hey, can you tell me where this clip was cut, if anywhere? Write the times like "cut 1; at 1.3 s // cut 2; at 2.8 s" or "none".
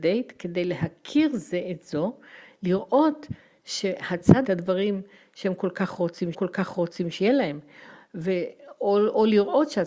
cut 1; at 4.4 s // cut 2; at 6.3 s

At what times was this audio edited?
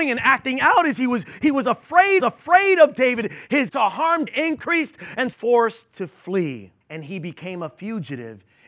cut 1; at 2.2 s // cut 2; at 3.7 s // cut 3; at 4.3 s // cut 4; at 5.3 s // cut 5; at 6.8 s

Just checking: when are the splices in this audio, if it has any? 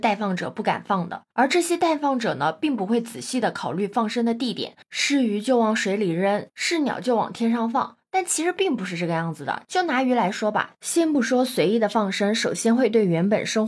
cut 1; at 1.3 s

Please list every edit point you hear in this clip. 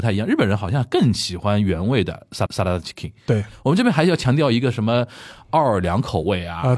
cut 1; at 2.5 s

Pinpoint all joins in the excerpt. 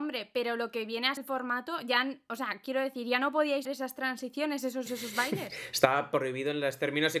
cut 1; at 1.2 s // cut 2; at 3.6 s // cut 3; at 4.9 s

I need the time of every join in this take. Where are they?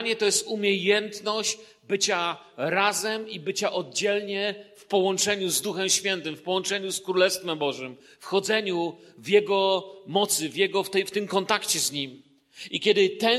none

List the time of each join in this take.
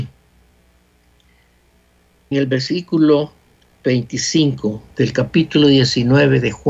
cut 1; at 2.3 s // cut 2; at 4.9 s

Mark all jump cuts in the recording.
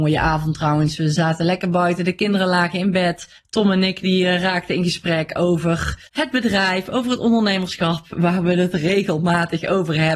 cut 1; at 3.4 s // cut 2; at 6.1 s

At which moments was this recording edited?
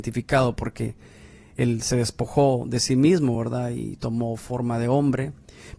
none

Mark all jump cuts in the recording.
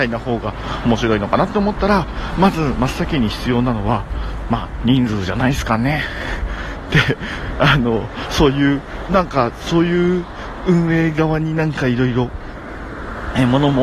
cut 1; at 9.1 s

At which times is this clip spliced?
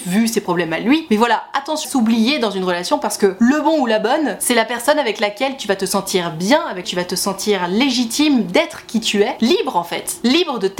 cut 1; at 1.8 s // cut 2; at 6.8 s

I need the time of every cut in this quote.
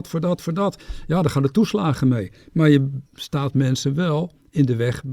cut 1; at 3.1 s

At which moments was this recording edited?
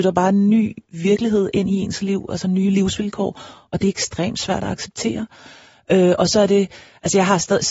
none

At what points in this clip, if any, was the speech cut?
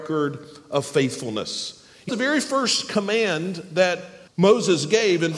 cut 1; at 2.1 s // cut 2; at 4.3 s

